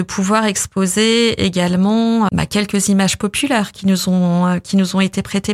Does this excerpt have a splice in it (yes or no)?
yes